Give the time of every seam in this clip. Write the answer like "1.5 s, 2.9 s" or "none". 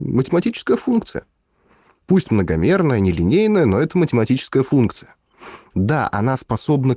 none